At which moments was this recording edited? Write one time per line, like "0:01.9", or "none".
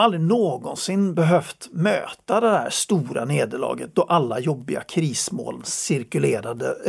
none